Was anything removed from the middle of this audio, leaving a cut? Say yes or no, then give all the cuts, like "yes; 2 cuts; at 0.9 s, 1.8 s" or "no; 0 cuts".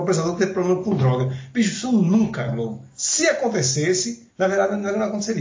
yes; 2 cuts; at 2.5 s, 4.3 s